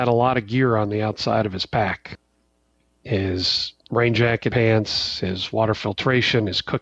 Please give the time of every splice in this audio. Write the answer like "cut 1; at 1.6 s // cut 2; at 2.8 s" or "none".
cut 1; at 3.8 s // cut 2; at 4.5 s